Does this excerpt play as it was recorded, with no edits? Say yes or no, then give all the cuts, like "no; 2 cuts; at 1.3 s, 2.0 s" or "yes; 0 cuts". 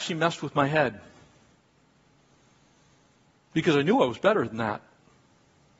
yes; 0 cuts